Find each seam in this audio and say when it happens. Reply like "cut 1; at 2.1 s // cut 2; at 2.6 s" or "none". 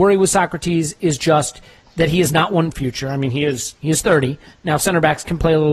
cut 1; at 2.7 s